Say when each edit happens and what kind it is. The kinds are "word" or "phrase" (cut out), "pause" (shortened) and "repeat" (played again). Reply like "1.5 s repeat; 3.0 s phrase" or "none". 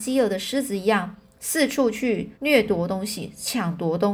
2.4 s pause